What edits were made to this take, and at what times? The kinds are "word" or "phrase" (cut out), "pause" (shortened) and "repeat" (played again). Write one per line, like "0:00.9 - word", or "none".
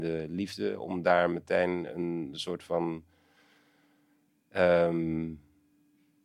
none